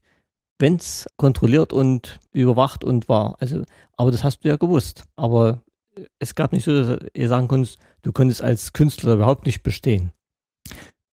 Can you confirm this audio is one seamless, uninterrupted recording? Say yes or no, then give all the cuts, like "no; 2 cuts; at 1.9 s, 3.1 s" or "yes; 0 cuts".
no; 3 cuts; at 1.1 s, 2.3 s, 5.1 s